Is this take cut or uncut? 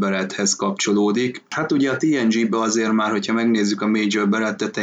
uncut